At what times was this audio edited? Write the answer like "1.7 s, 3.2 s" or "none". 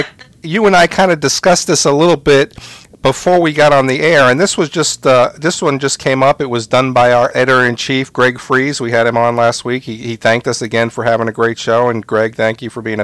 none